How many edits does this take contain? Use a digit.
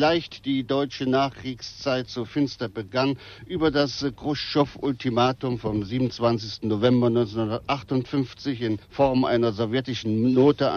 1